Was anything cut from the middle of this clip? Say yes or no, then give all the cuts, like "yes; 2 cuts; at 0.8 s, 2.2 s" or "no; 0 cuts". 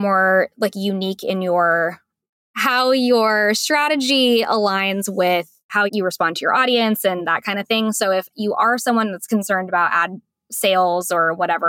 yes; 1 cut; at 5.9 s